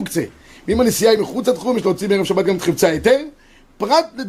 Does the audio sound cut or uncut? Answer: uncut